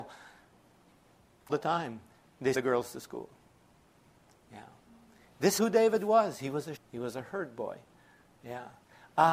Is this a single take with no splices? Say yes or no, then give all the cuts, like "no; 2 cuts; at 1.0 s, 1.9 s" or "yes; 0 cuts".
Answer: no; 4 cuts; at 1.5 s, 2.5 s, 5.6 s, 6.8 s